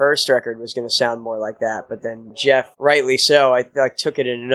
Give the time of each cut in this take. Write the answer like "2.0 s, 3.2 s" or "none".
2.7 s